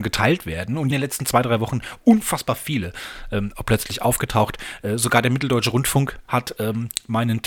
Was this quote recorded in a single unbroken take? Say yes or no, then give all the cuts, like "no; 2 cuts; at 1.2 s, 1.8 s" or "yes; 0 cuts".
no; 2 cuts; at 0.9 s, 6.2 s